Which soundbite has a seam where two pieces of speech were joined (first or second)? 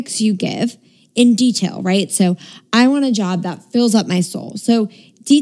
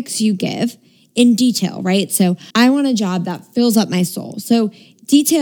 second